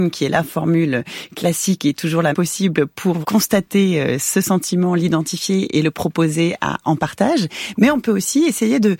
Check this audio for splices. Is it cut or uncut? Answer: cut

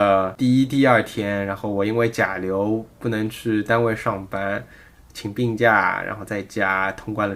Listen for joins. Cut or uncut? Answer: uncut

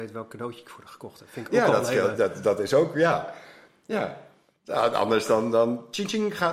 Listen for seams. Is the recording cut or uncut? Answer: uncut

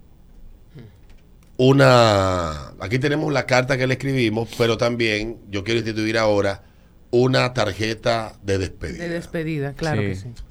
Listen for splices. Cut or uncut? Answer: uncut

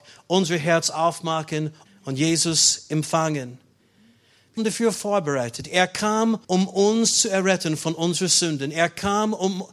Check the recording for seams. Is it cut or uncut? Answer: cut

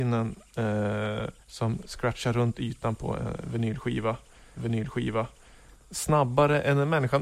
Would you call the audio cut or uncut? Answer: cut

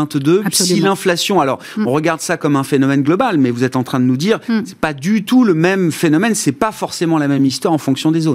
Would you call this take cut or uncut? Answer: uncut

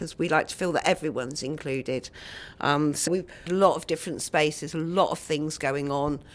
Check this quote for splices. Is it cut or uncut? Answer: cut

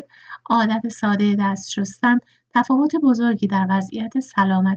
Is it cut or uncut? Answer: uncut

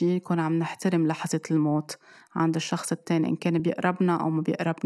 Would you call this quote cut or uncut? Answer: uncut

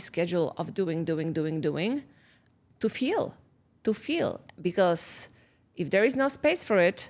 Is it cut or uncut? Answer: uncut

